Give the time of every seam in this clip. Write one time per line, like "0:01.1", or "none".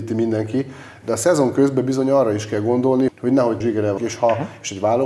0:03.1
0:03.6
0:04.0